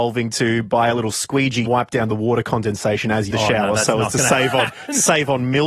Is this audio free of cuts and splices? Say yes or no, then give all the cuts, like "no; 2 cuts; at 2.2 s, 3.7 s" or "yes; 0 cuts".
no; 2 cuts; at 1.7 s, 3.3 s